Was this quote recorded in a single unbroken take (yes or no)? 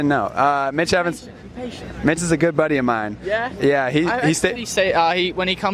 no